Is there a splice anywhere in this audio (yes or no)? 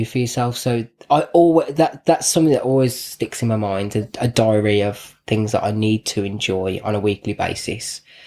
no